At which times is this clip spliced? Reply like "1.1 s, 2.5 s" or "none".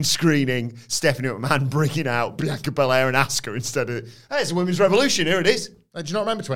none